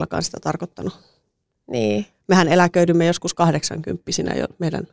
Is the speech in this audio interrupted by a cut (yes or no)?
no